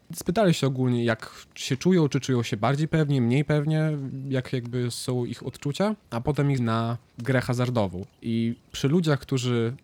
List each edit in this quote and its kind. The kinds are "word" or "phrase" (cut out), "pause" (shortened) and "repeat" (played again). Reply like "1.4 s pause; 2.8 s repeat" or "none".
6.0 s pause; 6.6 s word; 8.1 s pause